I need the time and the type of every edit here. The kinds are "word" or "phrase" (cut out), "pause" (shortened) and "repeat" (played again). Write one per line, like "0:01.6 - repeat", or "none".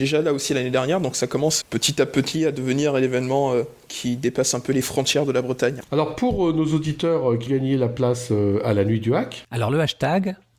0:01.6 - word
0:07.5 - word